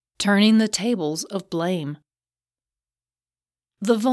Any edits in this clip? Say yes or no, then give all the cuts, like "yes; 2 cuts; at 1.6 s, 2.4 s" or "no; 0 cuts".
no; 0 cuts